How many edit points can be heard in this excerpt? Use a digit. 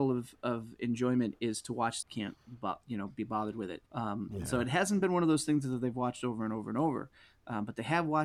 2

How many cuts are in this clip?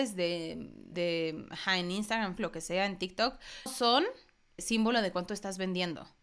4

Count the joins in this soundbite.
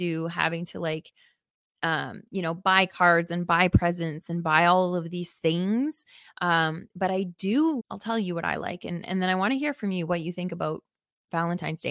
1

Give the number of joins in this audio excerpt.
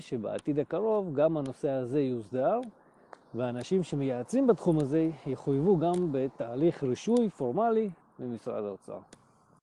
2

